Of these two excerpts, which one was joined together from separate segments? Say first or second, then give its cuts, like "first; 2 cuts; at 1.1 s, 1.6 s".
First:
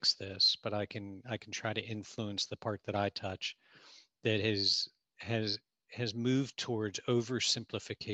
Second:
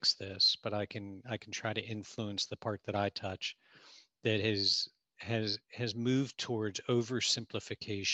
second; 1 cut; at 5.6 s